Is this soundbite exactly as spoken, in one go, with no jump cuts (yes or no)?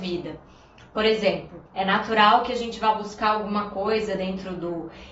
no